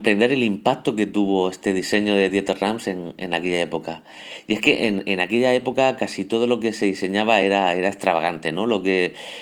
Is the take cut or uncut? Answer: uncut